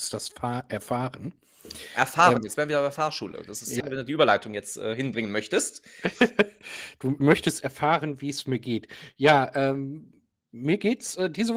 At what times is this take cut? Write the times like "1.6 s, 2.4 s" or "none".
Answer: 3.8 s, 7.2 s